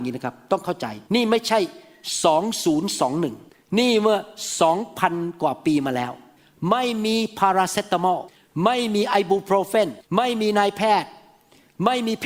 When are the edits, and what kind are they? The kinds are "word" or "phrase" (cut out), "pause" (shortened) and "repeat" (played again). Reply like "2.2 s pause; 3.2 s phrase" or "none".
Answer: 1.0 s pause; 10.0 s pause

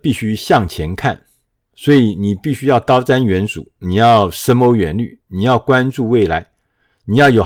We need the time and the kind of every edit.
none

